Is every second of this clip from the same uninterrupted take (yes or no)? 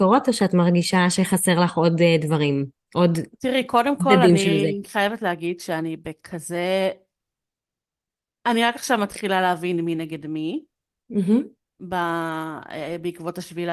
yes